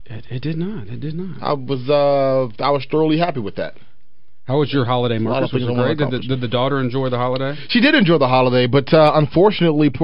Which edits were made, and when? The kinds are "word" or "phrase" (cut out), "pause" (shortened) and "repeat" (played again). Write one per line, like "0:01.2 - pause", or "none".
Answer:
none